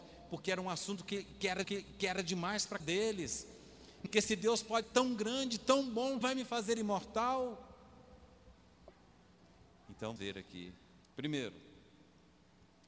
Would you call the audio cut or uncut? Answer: cut